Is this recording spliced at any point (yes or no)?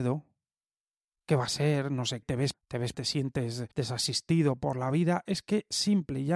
yes